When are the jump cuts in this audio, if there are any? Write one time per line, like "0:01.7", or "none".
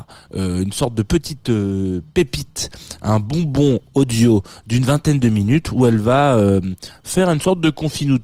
none